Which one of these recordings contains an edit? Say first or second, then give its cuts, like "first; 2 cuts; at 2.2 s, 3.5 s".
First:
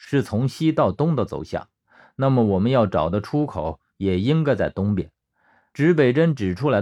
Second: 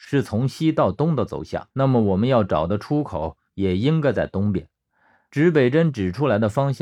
second; 1 cut; at 1.7 s